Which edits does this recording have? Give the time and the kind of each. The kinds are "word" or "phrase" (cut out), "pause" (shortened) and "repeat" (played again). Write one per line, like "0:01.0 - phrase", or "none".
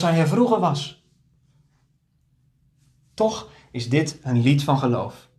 none